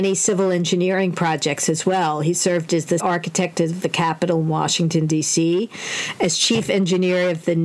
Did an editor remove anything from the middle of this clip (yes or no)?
yes